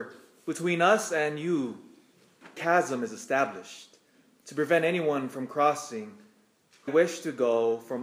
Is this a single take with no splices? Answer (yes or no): no